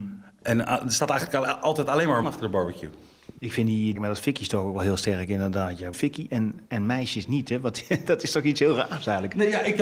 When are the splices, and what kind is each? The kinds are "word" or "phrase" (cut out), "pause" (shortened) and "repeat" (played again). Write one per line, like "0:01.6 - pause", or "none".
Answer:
0:02.2 - word
0:04.0 - phrase
0:05.9 - phrase
0:06.7 - pause